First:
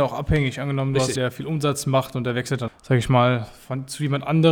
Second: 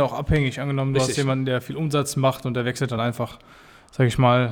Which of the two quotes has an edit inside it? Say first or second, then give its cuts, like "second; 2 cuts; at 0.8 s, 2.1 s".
first; 2 cuts; at 1.2 s, 2.7 s